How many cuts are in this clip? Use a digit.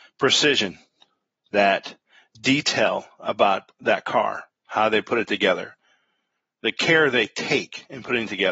0